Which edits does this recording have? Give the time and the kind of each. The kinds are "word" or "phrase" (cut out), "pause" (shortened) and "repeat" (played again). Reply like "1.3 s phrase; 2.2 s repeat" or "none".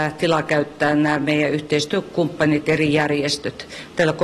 none